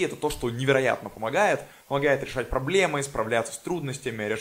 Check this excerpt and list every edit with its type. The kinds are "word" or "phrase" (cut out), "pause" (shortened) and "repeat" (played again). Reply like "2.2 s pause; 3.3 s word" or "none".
none